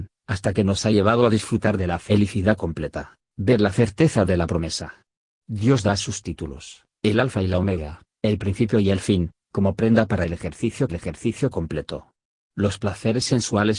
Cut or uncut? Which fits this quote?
cut